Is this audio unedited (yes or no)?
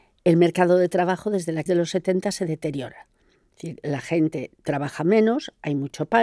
no